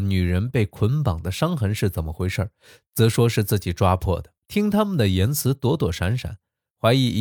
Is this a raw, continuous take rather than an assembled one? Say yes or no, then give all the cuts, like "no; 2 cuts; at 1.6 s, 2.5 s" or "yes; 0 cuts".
no; 1 cut; at 4.4 s